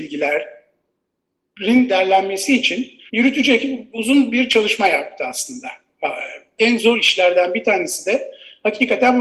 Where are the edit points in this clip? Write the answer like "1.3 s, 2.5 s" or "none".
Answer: 3.1 s